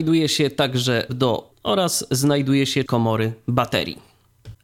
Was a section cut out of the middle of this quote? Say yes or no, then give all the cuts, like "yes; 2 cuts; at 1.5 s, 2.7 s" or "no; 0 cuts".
yes; 3 cuts; at 1.1 s, 1.5 s, 2.9 s